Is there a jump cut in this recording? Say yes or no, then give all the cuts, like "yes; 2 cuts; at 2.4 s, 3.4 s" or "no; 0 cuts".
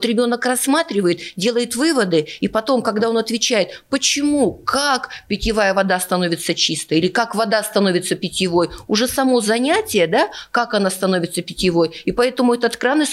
no; 0 cuts